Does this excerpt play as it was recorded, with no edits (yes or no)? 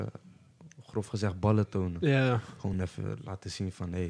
yes